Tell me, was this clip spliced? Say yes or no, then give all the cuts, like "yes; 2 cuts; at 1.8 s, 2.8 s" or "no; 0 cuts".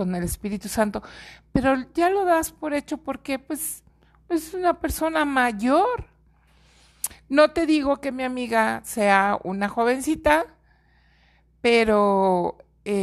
no; 0 cuts